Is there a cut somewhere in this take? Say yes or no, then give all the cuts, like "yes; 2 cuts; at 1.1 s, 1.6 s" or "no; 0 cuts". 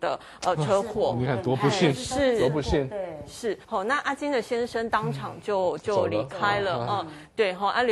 yes; 1 cut; at 3.6 s